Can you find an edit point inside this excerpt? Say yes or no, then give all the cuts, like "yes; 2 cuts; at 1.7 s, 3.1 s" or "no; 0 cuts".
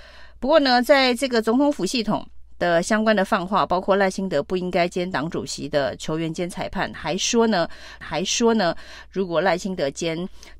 yes; 1 cut; at 8.0 s